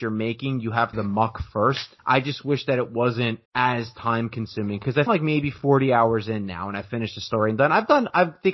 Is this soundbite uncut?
no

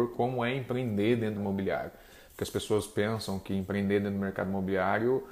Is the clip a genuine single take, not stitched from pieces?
no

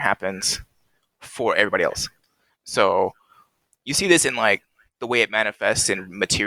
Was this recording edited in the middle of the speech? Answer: no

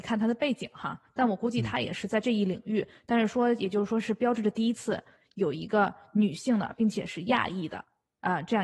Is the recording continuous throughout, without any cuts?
yes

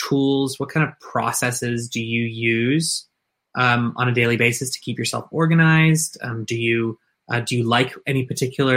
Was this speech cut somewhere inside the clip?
no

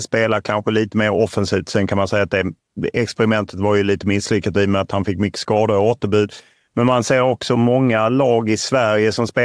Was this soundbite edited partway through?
no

